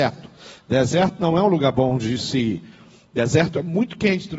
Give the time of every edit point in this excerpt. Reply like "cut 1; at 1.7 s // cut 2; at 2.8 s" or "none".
none